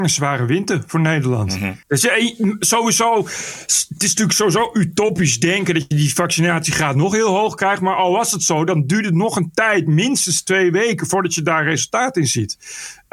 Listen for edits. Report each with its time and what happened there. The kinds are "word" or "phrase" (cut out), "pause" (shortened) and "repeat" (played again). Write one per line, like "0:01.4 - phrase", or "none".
0:01.8 - pause